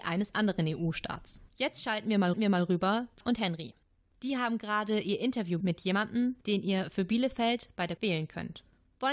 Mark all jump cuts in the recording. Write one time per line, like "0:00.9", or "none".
0:01.5
0:02.3
0:03.2
0:05.6
0:06.4
0:08.0